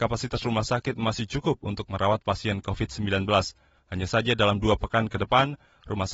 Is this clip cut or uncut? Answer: uncut